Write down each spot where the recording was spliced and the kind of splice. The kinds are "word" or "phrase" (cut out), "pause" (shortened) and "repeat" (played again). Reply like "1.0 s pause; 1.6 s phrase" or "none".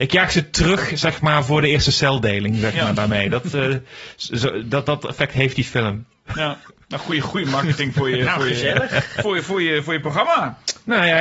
6.7 s pause